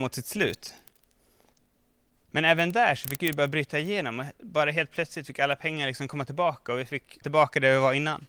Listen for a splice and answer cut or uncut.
cut